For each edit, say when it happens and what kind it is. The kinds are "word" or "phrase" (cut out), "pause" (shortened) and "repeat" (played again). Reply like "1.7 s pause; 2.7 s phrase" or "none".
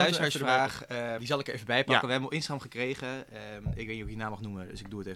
1.2 s word